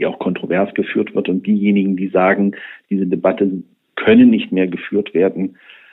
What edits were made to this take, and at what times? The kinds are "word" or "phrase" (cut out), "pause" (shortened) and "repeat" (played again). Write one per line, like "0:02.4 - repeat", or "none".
none